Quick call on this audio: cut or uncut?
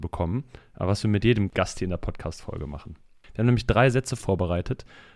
uncut